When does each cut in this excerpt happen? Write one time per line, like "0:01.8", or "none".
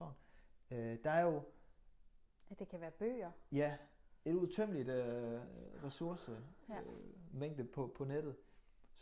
none